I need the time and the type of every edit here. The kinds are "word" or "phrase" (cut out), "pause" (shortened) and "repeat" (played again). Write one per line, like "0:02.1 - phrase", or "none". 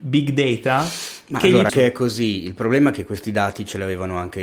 0:01.7 - phrase